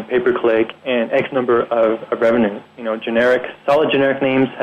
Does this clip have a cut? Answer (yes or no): no